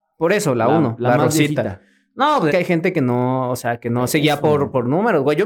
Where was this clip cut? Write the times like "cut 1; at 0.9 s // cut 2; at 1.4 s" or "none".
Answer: cut 1; at 2.5 s